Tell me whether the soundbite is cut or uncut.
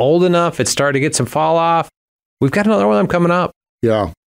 uncut